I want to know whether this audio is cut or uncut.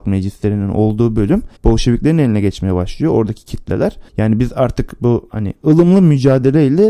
cut